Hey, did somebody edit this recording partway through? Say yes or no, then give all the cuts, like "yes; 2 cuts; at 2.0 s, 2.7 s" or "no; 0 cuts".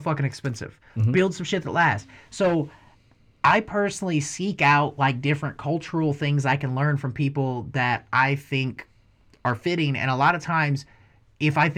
no; 0 cuts